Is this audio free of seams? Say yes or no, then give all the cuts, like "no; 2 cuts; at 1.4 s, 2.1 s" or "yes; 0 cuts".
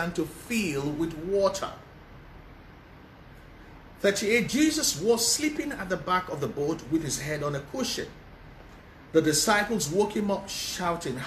yes; 0 cuts